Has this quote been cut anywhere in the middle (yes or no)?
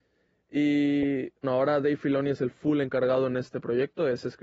yes